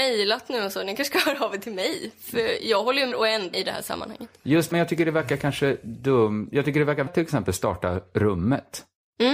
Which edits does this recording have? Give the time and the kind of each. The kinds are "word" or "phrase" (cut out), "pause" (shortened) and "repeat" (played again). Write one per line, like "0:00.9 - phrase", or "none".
0:03.1 - word
0:03.5 - word
0:04.7 - phrase
0:07.1 - word